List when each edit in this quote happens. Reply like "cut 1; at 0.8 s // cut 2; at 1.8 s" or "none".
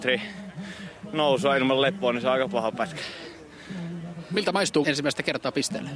cut 1; at 4.8 s